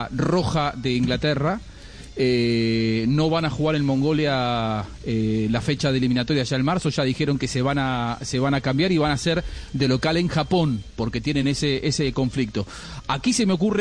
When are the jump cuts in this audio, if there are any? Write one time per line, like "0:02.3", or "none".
none